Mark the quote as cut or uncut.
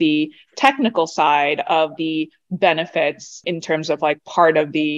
uncut